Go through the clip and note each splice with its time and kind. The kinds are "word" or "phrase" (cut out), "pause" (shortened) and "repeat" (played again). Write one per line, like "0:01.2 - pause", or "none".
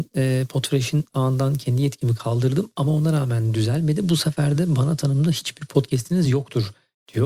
none